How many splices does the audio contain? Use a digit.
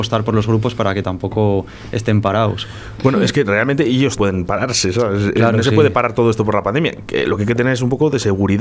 1